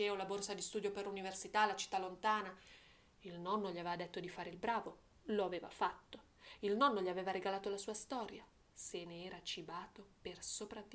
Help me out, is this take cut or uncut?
uncut